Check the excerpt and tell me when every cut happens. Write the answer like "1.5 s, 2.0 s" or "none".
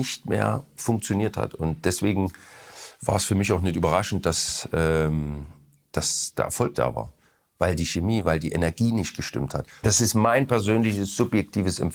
6.7 s